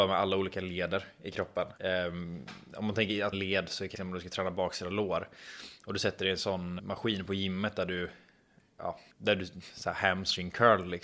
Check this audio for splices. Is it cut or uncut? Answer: cut